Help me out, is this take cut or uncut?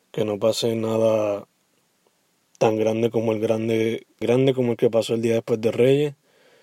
cut